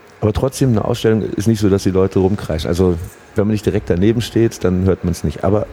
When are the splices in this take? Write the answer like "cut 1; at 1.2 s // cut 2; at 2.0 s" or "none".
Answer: none

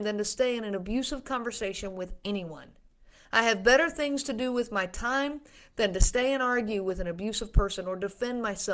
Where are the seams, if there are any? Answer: none

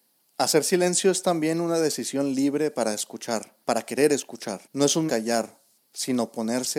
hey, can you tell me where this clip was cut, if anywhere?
cut 1; at 3.6 s // cut 2; at 4.6 s // cut 3; at 5.1 s

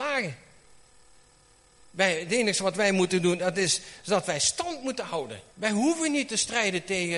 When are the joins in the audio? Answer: cut 1; at 5.5 s

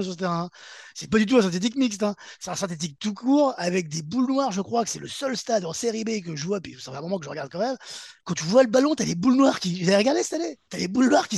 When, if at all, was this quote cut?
cut 1; at 8.2 s

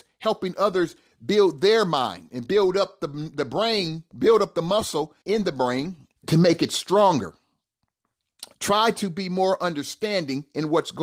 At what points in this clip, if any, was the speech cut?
cut 1; at 5.2 s // cut 2; at 6.2 s // cut 3; at 8.5 s

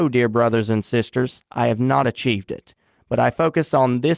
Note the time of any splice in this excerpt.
none

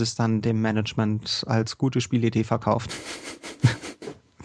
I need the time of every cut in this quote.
none

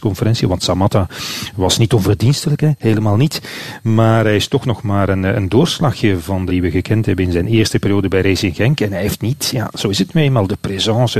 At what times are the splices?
cut 1; at 6.5 s

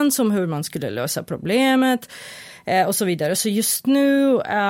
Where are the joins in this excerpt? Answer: none

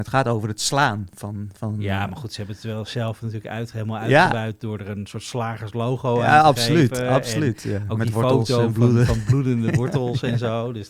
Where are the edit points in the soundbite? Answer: none

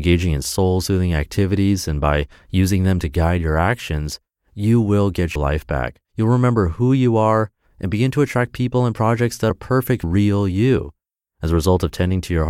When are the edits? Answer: cut 1; at 5.4 s // cut 2; at 6.0 s // cut 3; at 9.5 s // cut 4; at 10.0 s

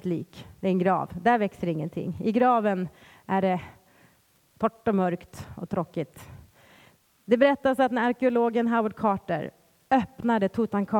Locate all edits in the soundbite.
none

